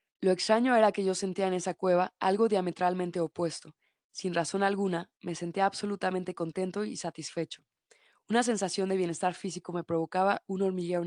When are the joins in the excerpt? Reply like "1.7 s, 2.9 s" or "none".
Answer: none